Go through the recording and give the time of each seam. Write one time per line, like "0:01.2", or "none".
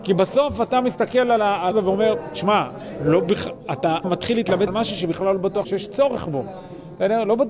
0:01.7
0:04.0
0:04.7
0:05.6